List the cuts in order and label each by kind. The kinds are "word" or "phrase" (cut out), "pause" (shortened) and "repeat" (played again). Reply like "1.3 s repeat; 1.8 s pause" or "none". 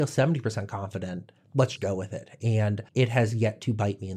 1.8 s word; 2.9 s pause